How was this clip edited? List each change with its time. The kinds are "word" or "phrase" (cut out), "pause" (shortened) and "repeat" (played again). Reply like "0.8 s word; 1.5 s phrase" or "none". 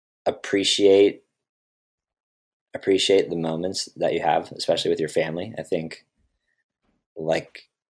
none